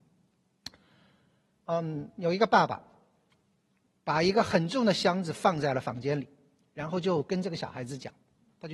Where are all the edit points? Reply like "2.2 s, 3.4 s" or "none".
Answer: none